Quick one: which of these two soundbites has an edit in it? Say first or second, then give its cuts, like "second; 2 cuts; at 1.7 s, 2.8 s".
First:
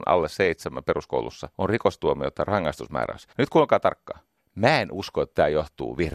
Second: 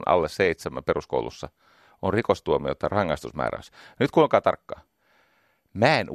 first; 3 cuts; at 1.5 s, 3.3 s, 4.4 s